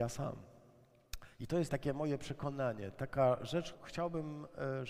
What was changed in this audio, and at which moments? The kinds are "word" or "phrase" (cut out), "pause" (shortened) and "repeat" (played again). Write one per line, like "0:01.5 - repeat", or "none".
0:01.7 - word
0:03.7 - word